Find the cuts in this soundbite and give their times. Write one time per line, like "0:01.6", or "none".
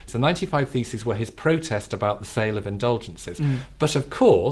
none